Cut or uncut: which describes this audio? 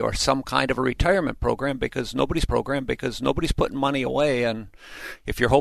cut